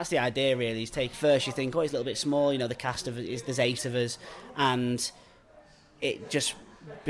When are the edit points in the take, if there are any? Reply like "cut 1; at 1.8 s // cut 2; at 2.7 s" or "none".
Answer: cut 1; at 1.1 s